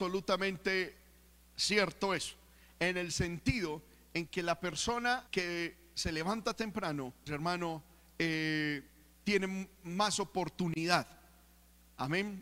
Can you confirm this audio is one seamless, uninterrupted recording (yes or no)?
no